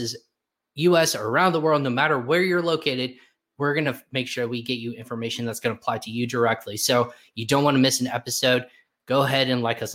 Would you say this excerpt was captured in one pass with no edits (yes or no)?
yes